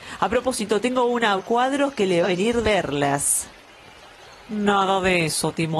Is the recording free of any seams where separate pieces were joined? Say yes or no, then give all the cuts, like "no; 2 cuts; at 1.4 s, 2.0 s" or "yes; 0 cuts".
no; 3 cuts; at 1.4 s, 2.2 s, 2.6 s